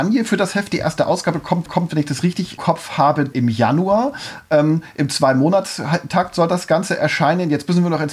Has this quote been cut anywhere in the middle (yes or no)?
yes